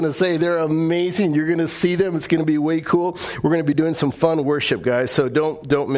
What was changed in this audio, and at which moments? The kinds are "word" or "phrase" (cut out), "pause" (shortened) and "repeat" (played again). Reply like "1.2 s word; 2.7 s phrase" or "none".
none